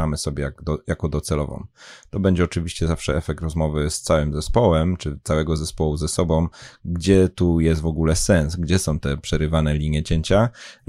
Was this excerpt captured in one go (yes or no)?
yes